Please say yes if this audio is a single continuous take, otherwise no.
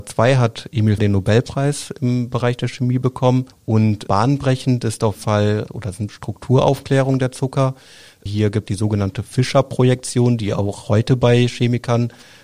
no